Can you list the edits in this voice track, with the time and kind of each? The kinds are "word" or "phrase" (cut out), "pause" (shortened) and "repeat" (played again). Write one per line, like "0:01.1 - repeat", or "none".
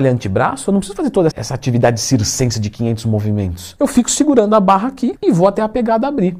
0:01.3 - word